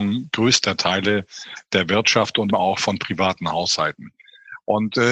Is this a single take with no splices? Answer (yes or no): no